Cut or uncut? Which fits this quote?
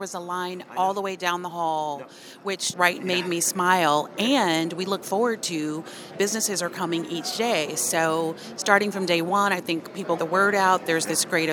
cut